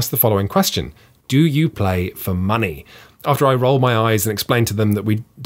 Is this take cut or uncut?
uncut